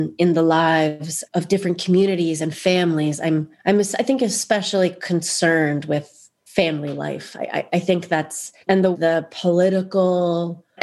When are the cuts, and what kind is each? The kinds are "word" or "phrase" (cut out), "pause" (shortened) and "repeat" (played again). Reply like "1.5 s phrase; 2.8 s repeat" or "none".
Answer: 1.3 s word; 3.6 s pause; 8.6 s pause; 8.9 s phrase